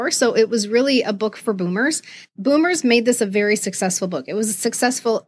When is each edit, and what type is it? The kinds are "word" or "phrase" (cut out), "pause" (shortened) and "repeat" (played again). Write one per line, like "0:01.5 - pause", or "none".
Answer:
none

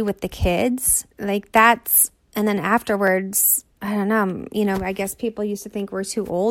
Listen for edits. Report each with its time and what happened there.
0:01.1 - pause
0:03.7 - pause

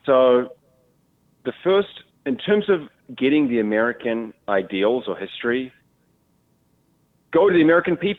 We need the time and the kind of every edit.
0:02.1 - pause
0:04.4 - pause

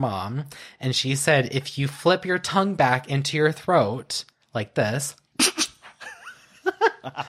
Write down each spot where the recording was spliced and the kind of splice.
none

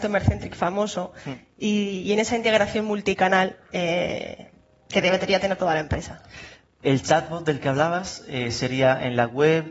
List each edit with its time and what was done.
none

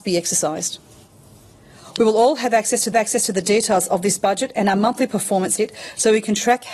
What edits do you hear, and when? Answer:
0:02.9 - repeat
0:05.6 - word

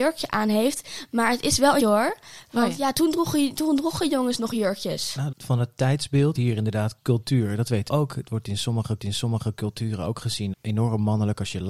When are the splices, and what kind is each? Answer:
0:01.8 - word
0:02.9 - word
0:05.3 - phrase
0:06.4 - word
0:07.9 - word
0:09.0 - repeat
0:10.5 - word

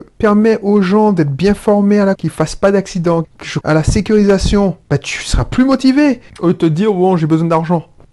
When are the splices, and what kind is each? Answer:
0:02.1 - word
0:03.2 - phrase
0:03.6 - word
0:04.8 - pause
0:06.3 - pause

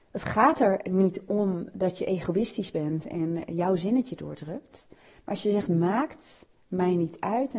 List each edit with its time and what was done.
none

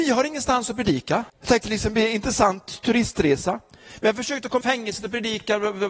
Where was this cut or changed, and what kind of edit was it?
0:01.3 - pause
0:04.6 - phrase

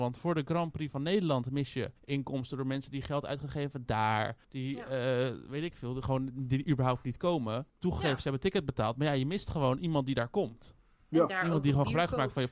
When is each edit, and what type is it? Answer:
0:02.0 - pause
0:04.4 - pause
0:07.7 - pause

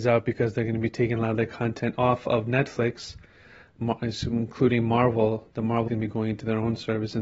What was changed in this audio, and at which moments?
0:05.9 - phrase

